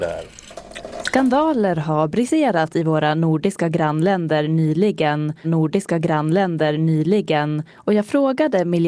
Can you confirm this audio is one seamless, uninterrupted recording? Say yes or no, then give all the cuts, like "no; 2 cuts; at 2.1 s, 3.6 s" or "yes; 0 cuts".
no; 1 cut; at 5.4 s